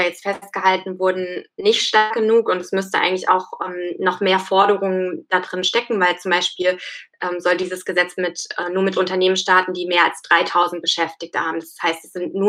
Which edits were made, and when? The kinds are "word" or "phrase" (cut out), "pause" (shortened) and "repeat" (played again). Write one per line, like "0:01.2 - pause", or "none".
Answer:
none